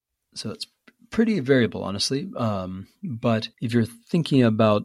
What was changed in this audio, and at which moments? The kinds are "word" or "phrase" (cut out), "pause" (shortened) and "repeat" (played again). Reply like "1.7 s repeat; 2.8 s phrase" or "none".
3.5 s pause